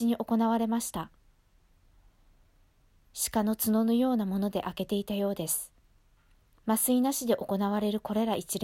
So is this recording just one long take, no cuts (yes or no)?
no